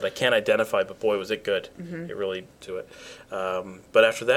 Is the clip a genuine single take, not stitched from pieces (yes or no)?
no